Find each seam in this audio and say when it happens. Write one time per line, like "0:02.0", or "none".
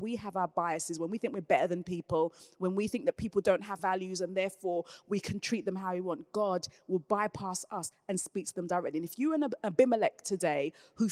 0:03.8